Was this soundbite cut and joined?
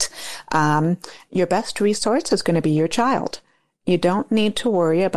no; 0 cuts

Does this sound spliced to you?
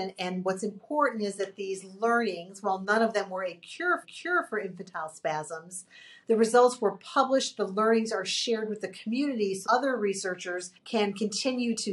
yes; 4 cuts; at 4.0 s, 6.2 s, 9.6 s, 10.8 s

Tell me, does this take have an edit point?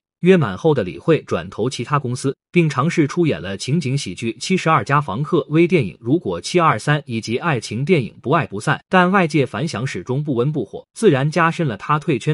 yes; 3 cuts; at 2.5 s, 8.8 s, 10.9 s

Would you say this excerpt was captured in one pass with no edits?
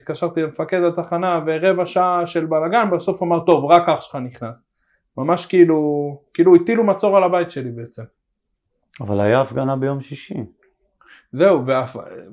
yes; 0 cuts

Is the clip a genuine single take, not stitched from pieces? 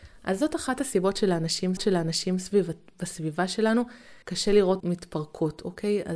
no; 3 cuts; at 1.8 s, 4.2 s, 4.8 s

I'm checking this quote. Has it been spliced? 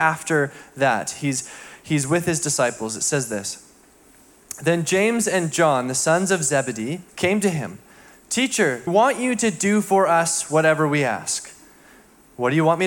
yes; 2 cuts; at 7.1 s, 8.9 s

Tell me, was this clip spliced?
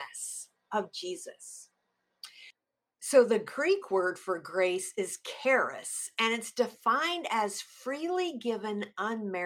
no; 0 cuts

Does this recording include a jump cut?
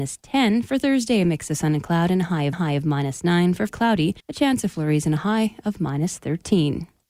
yes; 3 cuts; at 2.5 s, 3.7 s, 4.2 s

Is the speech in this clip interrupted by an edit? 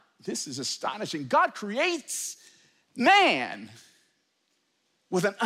no; 0 cuts

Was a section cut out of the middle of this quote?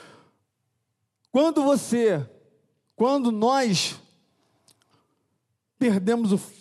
no; 0 cuts

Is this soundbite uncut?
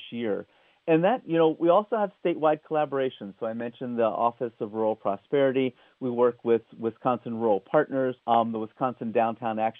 no; 1 cut; at 8.2 s

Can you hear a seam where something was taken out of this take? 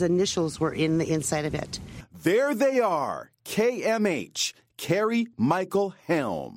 no; 0 cuts

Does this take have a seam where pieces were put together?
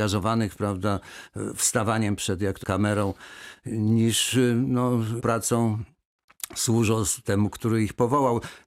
yes; 2 cuts; at 2.6 s, 5.2 s

